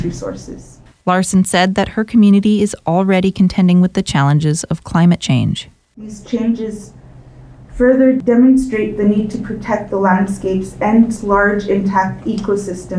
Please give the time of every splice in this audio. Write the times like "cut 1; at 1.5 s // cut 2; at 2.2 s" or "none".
none